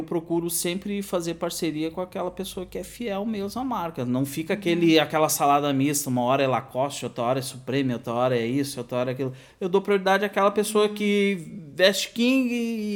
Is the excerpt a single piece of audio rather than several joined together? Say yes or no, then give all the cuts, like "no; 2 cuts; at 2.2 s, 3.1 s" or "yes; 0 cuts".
yes; 0 cuts